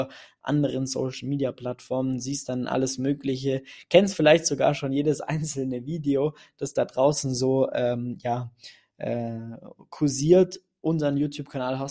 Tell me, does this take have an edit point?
no; 0 cuts

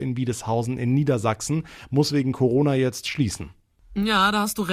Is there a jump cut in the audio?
yes; 1 cut; at 3.0 s

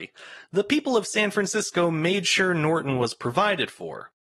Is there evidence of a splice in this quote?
no; 0 cuts

